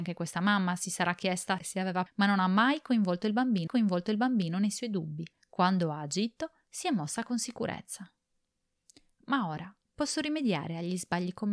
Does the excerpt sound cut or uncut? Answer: cut